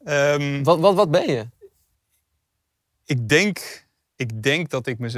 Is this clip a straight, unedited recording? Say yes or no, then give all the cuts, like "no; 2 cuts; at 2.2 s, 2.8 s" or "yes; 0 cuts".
yes; 0 cuts